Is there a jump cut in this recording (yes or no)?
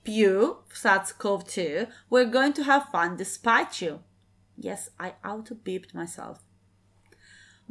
no